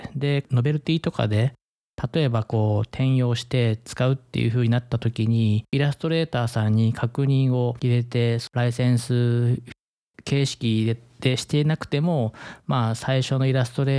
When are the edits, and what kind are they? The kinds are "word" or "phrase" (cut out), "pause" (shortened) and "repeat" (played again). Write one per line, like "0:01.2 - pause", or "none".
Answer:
0:05.7 - pause